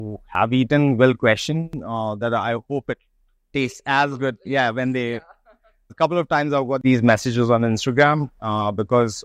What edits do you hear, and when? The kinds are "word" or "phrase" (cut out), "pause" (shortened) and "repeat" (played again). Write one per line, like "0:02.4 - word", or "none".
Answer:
0:05.9 - word